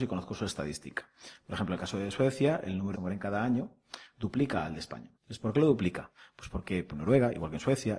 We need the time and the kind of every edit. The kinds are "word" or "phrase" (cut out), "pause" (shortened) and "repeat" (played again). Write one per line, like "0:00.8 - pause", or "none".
0:02.9 - phrase
0:05.1 - pause
0:06.9 - word